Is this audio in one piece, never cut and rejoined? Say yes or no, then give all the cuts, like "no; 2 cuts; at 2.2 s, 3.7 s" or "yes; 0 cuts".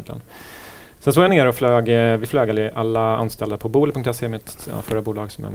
yes; 0 cuts